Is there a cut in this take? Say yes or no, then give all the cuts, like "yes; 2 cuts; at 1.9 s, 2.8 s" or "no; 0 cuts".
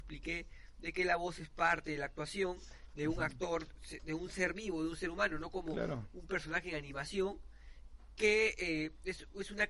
no; 0 cuts